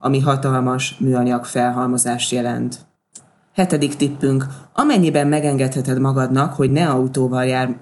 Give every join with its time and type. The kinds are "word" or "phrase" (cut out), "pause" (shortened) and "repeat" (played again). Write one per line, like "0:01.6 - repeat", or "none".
none